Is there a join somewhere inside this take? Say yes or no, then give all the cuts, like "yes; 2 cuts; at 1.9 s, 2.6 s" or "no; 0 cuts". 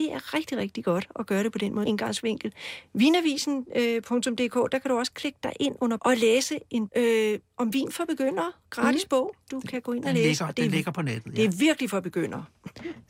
yes; 3 cuts; at 1.9 s, 6.0 s, 6.9 s